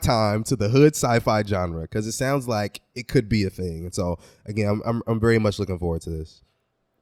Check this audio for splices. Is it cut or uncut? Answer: uncut